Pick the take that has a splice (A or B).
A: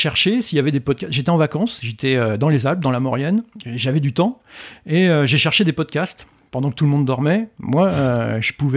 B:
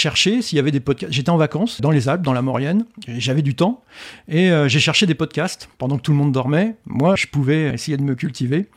B